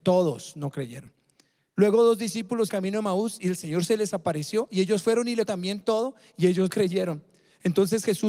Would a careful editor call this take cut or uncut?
cut